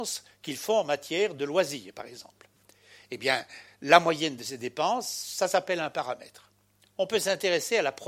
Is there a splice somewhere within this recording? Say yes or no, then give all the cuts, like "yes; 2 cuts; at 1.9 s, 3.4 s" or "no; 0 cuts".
no; 0 cuts